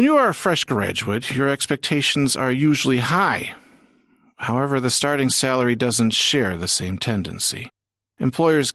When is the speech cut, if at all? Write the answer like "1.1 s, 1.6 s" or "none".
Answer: none